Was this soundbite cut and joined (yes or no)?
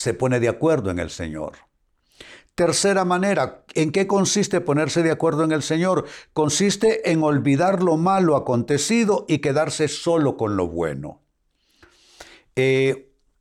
no